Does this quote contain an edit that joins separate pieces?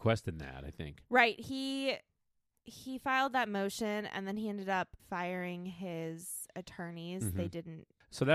yes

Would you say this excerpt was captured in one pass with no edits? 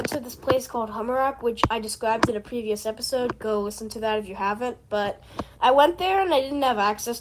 yes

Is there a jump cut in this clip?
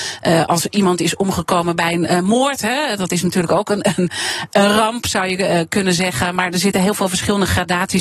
no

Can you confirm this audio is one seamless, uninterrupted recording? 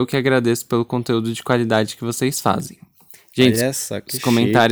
yes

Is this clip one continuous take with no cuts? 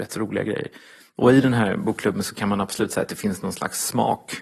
yes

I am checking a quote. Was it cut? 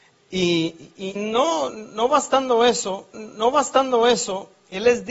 yes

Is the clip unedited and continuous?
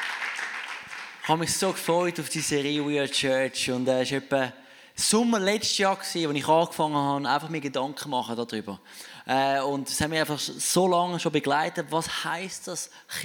yes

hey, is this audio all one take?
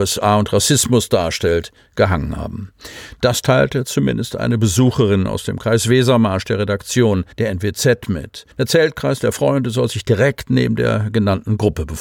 no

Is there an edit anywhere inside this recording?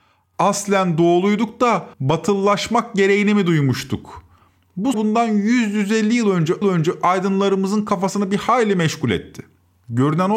yes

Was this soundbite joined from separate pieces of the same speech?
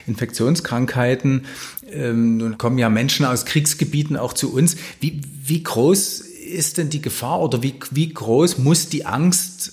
no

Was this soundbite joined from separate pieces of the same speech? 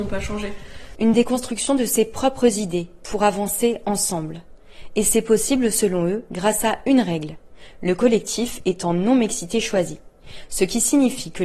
no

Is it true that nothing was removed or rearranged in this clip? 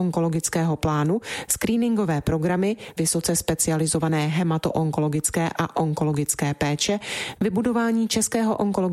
no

